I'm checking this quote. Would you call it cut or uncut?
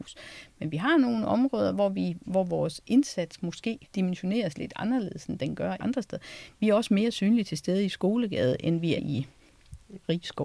cut